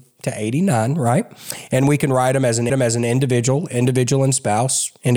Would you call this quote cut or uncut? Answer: cut